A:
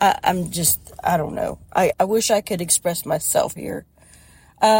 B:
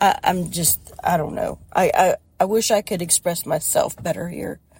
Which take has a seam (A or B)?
A